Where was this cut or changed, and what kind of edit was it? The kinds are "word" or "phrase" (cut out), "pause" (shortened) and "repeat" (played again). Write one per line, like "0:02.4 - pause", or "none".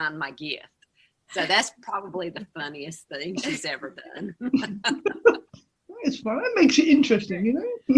none